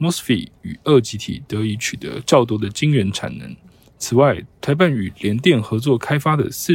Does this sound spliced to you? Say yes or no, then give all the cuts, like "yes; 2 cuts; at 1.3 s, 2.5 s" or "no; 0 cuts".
no; 0 cuts